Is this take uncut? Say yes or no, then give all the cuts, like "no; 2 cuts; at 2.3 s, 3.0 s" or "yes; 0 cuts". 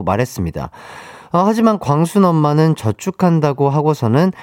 yes; 0 cuts